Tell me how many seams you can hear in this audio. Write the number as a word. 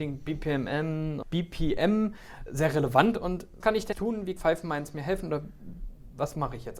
five